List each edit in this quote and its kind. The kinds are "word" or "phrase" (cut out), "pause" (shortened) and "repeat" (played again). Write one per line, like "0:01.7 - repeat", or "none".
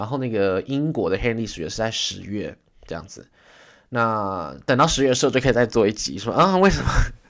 none